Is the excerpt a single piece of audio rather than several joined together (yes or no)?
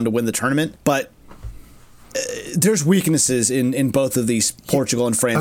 yes